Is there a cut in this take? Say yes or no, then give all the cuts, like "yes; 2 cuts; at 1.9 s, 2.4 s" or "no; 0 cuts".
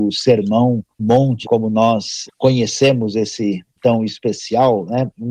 yes; 4 cuts; at 1.0 s, 1.4 s, 2.3 s, 3.8 s